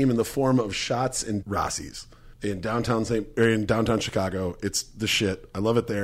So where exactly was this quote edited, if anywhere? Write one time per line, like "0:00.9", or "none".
0:01.4
0:02.3